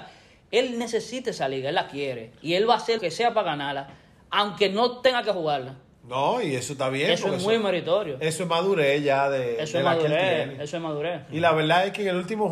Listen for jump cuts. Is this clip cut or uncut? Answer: cut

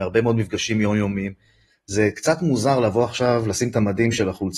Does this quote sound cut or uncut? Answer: uncut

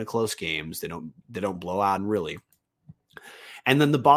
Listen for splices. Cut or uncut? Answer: cut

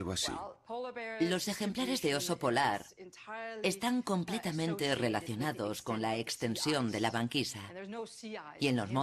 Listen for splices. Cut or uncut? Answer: uncut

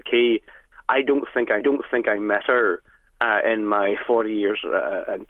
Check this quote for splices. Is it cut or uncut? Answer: cut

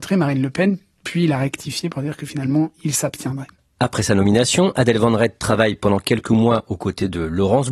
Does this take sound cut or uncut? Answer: uncut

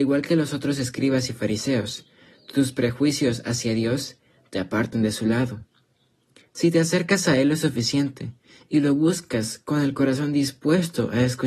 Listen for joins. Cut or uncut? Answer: uncut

